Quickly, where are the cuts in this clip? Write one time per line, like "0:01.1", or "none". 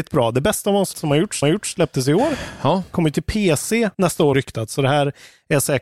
0:00.9
0:01.4
0:03.9
0:04.3